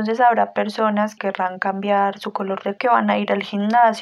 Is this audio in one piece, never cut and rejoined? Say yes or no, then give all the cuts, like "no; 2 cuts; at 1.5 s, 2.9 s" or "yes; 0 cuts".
no; 2 cuts; at 1.2 s, 2.8 s